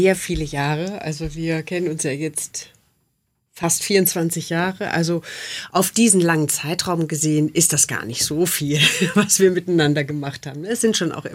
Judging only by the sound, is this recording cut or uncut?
uncut